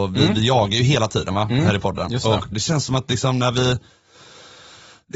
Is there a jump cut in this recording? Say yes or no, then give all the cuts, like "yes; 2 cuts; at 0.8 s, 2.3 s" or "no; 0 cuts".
yes; 1 cut; at 2.5 s